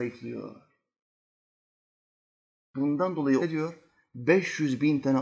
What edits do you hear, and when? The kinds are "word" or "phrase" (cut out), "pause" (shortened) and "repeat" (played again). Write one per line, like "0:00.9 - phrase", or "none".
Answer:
0:03.4 - word